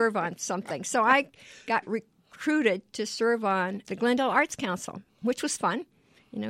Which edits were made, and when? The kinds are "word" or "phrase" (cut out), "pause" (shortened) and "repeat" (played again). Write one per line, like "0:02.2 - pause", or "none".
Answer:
0:03.8 - word